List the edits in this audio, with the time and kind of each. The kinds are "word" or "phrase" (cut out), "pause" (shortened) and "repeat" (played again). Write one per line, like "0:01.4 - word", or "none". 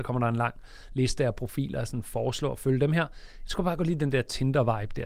none